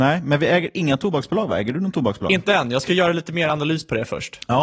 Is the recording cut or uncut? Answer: uncut